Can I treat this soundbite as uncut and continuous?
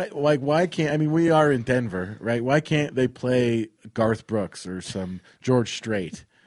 yes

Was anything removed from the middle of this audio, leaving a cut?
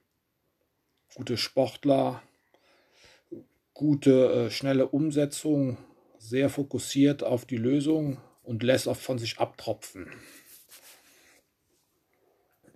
yes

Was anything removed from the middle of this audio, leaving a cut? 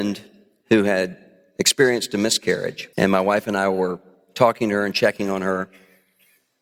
yes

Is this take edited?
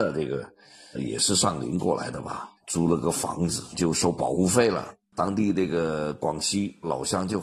yes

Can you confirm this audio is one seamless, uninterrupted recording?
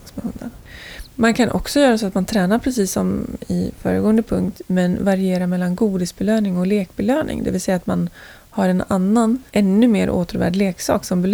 no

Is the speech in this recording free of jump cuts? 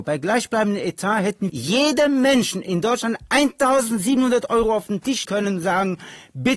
no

